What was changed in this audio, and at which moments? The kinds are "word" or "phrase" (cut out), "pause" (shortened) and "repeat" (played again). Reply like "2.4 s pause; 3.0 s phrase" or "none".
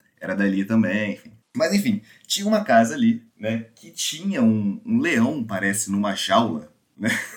3.3 s pause